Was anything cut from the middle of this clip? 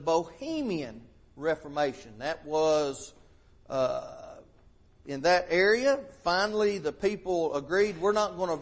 no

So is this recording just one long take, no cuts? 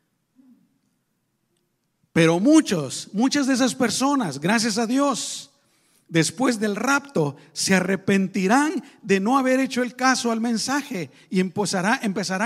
yes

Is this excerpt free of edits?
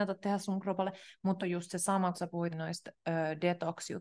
no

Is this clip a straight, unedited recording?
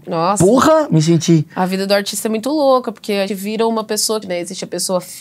no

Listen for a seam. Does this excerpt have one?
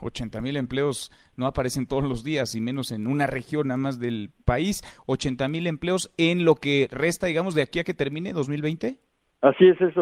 no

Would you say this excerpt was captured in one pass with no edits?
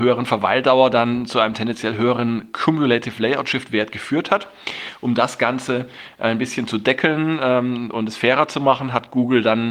yes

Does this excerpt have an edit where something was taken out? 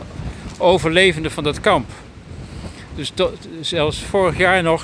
no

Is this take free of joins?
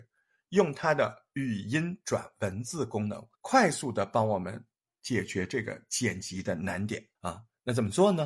no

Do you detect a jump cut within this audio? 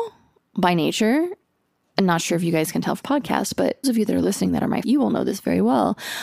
yes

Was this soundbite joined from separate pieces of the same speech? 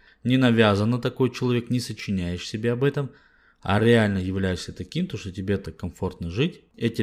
no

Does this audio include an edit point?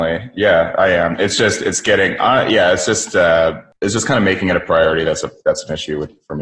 no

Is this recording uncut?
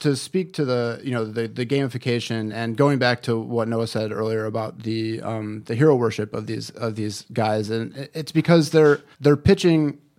no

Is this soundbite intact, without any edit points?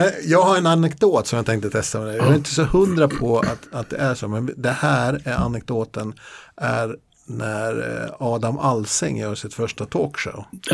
yes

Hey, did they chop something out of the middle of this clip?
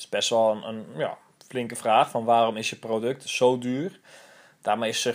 no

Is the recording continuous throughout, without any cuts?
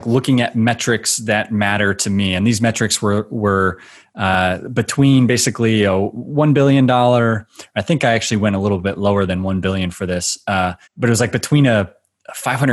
no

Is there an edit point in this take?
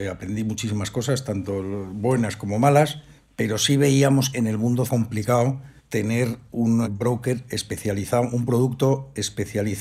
yes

